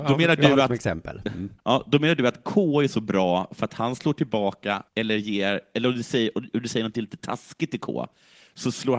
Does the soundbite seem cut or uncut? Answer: cut